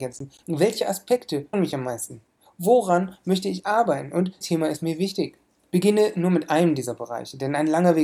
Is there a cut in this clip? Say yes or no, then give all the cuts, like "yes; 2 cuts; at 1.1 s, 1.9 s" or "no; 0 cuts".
yes; 2 cuts; at 1.5 s, 4.4 s